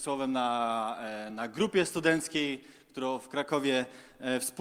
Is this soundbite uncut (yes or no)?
yes